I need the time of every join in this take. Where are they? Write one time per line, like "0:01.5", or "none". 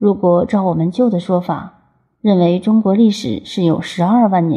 none